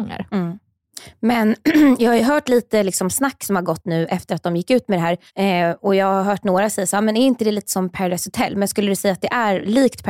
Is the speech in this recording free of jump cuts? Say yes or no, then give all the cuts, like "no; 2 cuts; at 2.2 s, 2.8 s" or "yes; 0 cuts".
no; 1 cut; at 5.3 s